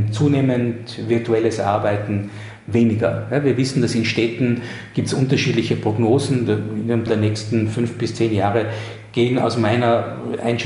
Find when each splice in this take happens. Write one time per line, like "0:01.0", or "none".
0:07.1